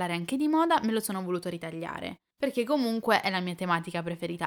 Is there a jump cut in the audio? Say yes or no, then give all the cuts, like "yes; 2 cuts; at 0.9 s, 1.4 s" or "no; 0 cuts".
yes; 1 cut; at 2.3 s